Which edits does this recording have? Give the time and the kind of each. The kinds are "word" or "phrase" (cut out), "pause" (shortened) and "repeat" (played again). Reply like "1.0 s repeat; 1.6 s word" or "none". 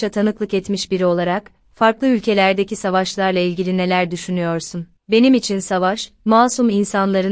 5.0 s pause